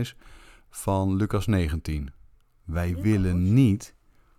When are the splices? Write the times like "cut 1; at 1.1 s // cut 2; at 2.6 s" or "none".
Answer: none

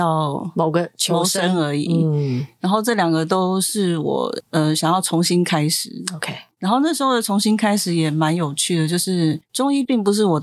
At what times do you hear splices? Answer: cut 1; at 6.5 s // cut 2; at 9.5 s

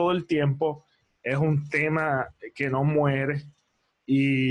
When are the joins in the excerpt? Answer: none

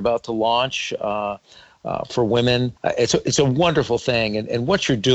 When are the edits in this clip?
cut 1; at 2.8 s

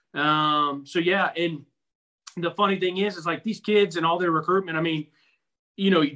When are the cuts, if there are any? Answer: none

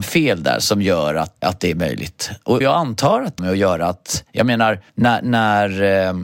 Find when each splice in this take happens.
cut 1; at 1.4 s // cut 2; at 2.6 s // cut 3; at 3.4 s // cut 4; at 4.9 s

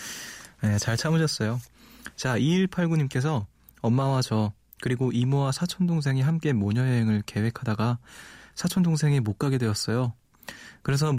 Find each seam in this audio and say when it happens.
none

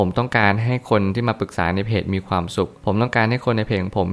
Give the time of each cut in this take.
cut 1; at 2.8 s

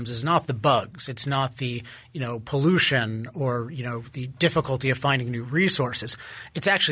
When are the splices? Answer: none

